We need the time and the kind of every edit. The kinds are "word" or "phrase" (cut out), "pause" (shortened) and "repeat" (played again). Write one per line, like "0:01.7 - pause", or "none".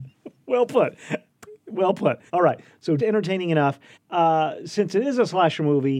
0:02.3 - pause
0:03.0 - word
0:03.9 - pause